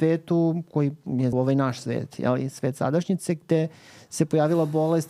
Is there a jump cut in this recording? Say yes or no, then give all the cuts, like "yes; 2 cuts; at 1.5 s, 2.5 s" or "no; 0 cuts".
yes; 1 cut; at 1.3 s